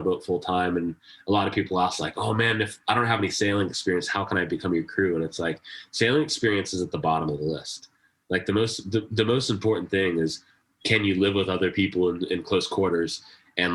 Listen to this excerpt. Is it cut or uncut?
uncut